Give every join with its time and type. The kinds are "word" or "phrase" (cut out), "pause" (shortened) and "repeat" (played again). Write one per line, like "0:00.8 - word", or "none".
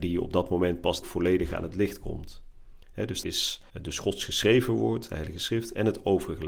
0:01.0 - word
0:03.2 - word
0:03.7 - pause